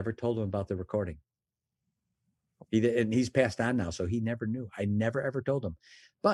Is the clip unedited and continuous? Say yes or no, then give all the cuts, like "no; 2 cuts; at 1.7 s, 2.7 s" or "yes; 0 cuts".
yes; 0 cuts